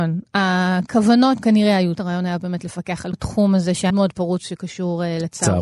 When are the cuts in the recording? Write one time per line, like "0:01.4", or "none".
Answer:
0:01.4
0:01.9
0:03.1
0:03.9